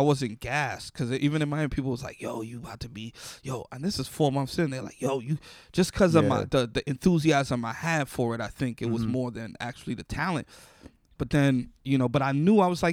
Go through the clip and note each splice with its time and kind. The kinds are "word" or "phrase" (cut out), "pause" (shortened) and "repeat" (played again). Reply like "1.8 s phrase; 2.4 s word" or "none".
none